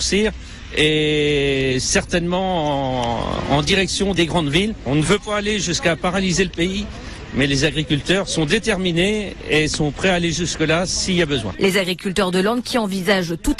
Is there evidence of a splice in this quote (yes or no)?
no